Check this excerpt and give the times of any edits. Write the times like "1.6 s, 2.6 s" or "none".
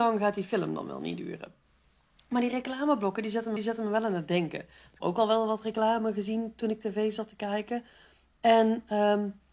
3.6 s, 5.0 s